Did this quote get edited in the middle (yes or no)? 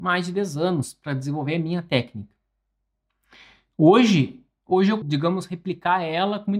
yes